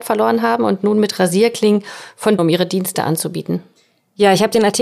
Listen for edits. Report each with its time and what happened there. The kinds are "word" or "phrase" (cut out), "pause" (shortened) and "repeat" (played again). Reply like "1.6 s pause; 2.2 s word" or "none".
2.4 s phrase